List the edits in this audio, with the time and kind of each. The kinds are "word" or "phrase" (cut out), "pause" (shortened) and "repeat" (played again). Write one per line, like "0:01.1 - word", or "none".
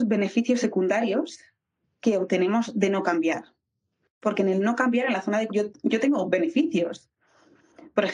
0:05.5 - word